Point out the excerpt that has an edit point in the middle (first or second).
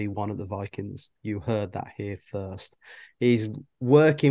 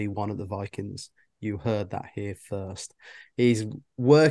first